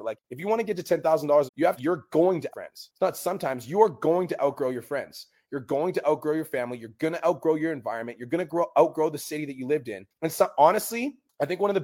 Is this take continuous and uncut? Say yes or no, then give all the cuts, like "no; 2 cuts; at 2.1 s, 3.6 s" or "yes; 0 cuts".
no; 3 cuts; at 1.5 s, 1.8 s, 2.5 s